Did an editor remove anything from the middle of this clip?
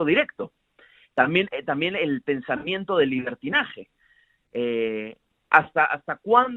no; 0 cuts

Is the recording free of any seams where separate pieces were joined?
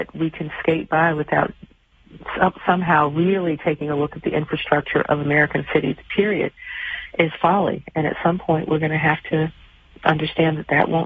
yes; 0 cuts

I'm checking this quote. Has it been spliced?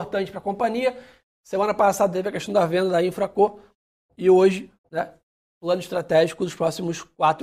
no; 0 cuts

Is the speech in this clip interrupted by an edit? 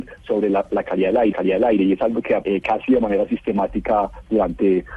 yes; 2 cuts; at 1.3 s, 2.4 s

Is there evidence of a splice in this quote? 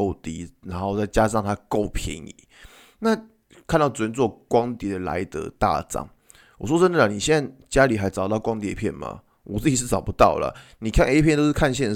no; 0 cuts

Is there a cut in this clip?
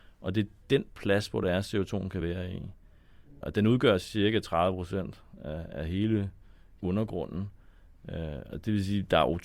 no; 0 cuts

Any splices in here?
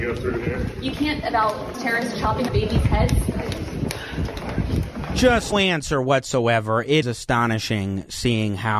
yes; 5 cuts; at 1.2 s, 1.7 s, 2.5 s, 5.5 s, 7.0 s

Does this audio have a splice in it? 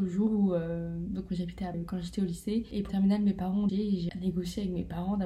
yes; 4 cuts; at 1.7 s, 2.9 s, 3.7 s, 4.1 s

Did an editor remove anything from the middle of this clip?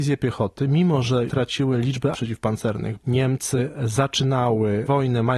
yes; 3 cuts; at 1.3 s, 2.1 s, 3.0 s

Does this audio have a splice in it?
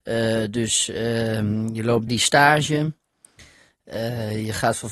yes; 1 cut; at 2.1 s

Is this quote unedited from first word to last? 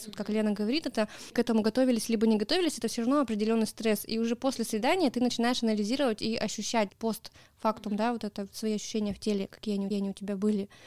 no; 3 cuts; at 1.3 s, 6.9 s, 9.9 s

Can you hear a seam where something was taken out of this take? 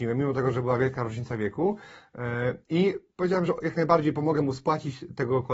no; 0 cuts

